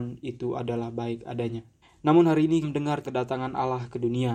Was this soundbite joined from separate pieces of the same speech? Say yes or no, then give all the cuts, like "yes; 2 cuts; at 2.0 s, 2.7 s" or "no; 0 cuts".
yes; 3 cuts; at 1.8 s, 2.6 s, 3.0 s